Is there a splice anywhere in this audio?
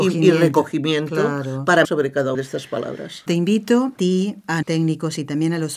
yes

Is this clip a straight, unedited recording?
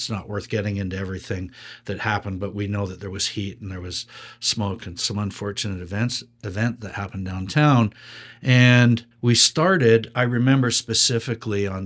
no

